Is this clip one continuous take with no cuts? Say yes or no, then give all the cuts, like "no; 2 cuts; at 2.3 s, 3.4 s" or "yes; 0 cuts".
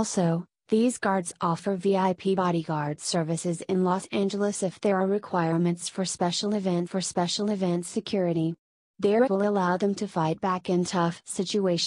no; 2 cuts; at 6.9 s, 9.3 s